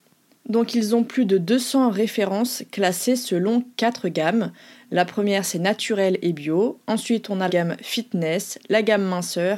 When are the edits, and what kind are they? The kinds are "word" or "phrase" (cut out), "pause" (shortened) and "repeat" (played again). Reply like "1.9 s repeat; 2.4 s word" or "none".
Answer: 7.5 s word

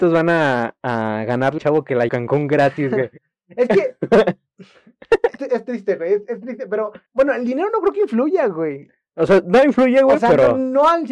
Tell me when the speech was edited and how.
1.6 s word; 2.1 s phrase; 3.2 s pause; 5.4 s word; 7.1 s pause

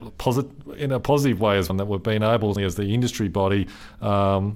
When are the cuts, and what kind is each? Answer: 1.7 s word; 2.6 s word

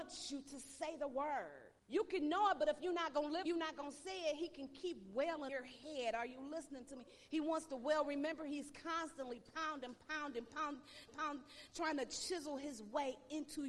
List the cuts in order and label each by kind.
1.8 s pause; 3.5 s phrase; 5.5 s word; 11.1 s repeat

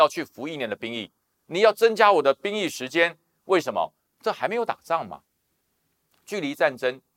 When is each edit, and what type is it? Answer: none

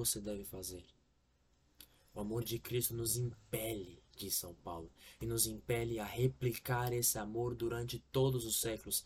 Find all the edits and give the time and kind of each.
none

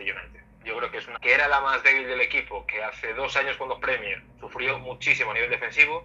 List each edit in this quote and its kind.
1.1 s word; 3.8 s word; 4.3 s pause

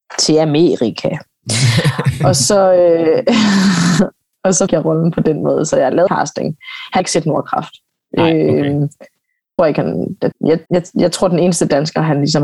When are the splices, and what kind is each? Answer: 4.7 s word; 6.1 s word; 7.0 s word; 9.6 s word; 10.3 s word; 10.7 s word

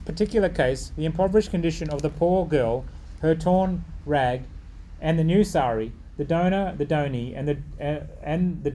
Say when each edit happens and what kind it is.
none

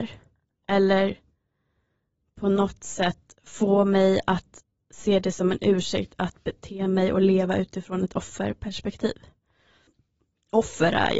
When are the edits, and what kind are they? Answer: none

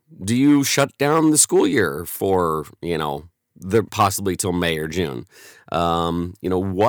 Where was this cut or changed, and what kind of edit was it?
3.9 s word

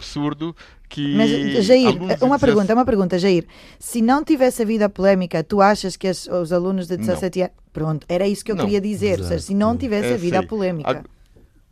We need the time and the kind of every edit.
none

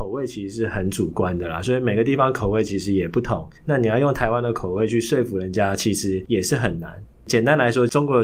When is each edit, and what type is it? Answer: 3.6 s pause

